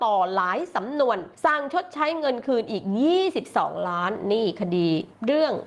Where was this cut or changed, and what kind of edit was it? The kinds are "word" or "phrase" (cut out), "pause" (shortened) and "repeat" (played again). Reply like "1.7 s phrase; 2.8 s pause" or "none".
1.3 s pause